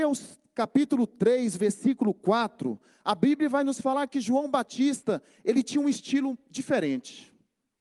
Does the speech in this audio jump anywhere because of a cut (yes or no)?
no